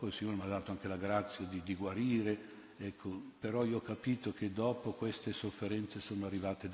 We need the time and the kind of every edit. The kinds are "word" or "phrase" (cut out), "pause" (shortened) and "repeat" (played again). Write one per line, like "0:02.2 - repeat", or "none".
none